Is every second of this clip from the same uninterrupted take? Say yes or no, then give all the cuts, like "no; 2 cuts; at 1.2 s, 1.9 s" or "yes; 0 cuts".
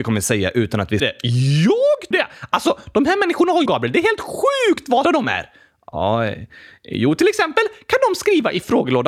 no; 4 cuts; at 1.0 s, 2.1 s, 3.7 s, 5.0 s